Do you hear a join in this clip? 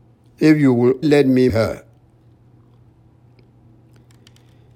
yes; 2 cuts; at 1.0 s, 1.5 s

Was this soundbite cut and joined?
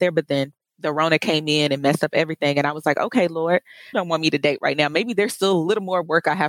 yes; 1 cut; at 3.9 s

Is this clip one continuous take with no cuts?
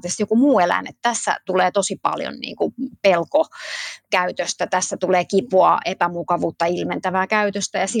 yes; 0 cuts

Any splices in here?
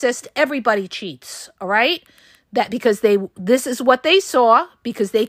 no; 0 cuts

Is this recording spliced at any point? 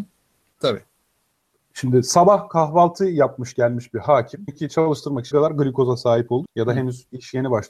yes; 3 cuts; at 4.5 s, 5.3 s, 6.4 s

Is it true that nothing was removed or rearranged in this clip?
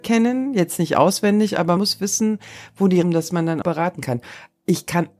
no; 3 cuts; at 1.8 s, 3.0 s, 3.6 s

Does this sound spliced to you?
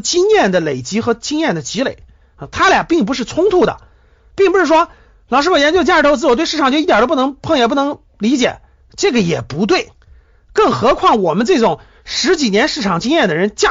no; 0 cuts

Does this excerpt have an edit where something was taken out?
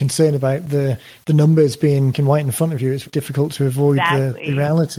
yes; 2 cuts; at 2.1 s, 3.0 s

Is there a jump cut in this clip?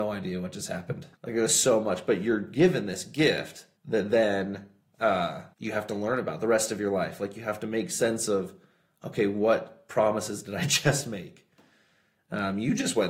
yes; 3 cuts; at 1.1 s, 3.8 s, 5.5 s

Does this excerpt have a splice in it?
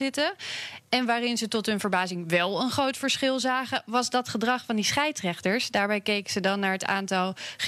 no; 0 cuts

